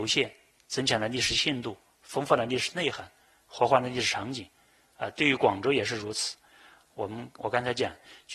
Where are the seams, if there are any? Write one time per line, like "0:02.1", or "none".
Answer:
none